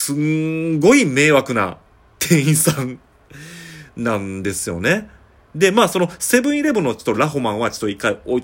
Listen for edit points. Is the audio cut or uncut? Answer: uncut